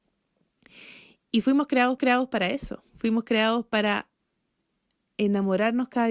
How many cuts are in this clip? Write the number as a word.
one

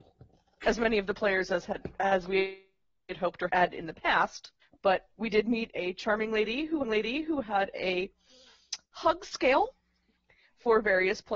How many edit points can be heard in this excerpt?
four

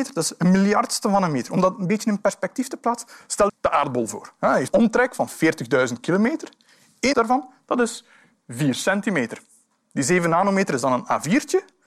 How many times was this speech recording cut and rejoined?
three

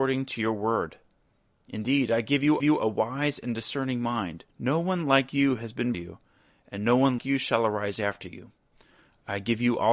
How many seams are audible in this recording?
four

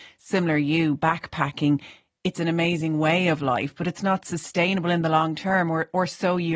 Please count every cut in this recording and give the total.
zero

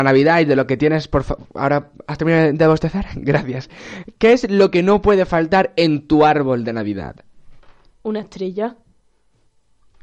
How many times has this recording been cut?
zero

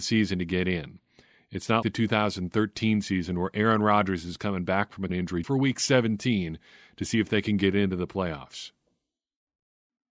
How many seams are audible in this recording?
three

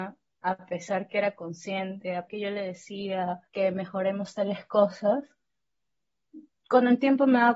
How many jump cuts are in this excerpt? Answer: two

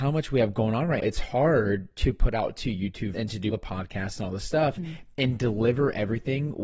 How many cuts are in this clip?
four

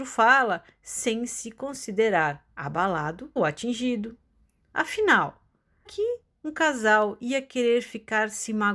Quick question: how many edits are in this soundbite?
two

